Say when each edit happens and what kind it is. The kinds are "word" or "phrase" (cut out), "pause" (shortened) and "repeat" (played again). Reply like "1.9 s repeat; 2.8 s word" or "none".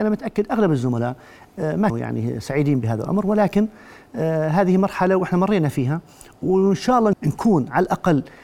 1.9 s word; 7.1 s word